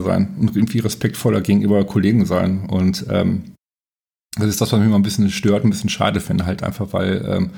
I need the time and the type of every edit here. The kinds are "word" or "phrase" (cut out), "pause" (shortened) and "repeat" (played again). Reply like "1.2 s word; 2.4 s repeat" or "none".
none